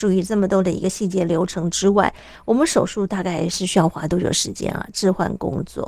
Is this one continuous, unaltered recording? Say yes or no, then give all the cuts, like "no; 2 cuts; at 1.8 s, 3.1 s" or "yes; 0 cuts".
yes; 0 cuts